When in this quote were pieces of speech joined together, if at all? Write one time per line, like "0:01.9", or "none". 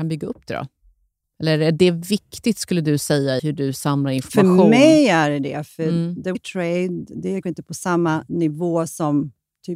0:03.4
0:06.3
0:07.4